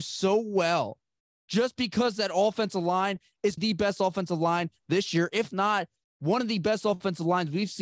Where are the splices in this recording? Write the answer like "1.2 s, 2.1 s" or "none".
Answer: 3.6 s